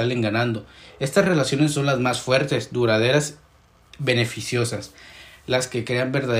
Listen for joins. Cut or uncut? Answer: uncut